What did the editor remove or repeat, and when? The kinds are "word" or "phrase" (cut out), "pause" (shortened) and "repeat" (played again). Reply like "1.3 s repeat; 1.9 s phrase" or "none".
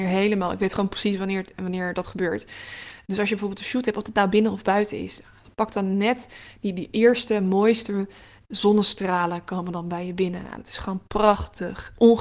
none